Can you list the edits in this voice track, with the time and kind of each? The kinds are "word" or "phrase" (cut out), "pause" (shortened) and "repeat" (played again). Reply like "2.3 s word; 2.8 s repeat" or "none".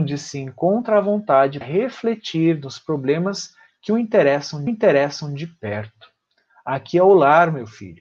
1.6 s word; 4.7 s repeat